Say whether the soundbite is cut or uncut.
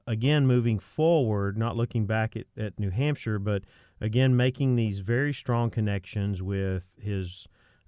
uncut